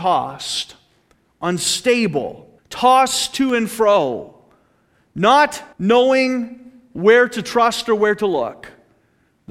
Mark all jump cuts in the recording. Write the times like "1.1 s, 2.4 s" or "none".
2.6 s, 5.7 s